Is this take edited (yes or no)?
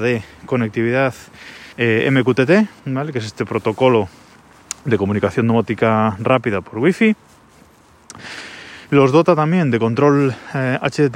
yes